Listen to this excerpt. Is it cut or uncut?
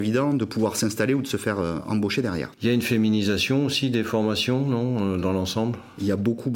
cut